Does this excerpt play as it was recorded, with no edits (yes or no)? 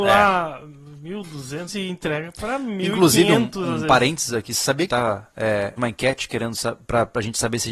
no